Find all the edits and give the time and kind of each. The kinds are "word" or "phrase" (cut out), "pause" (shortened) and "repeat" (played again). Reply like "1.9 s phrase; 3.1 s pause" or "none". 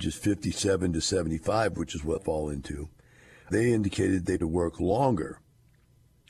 2.2 s word; 3.5 s word; 4.4 s word

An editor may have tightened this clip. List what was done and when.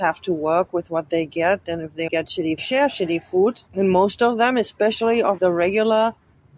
2.1 s word; 2.6 s phrase; 3.7 s pause; 5.4 s word

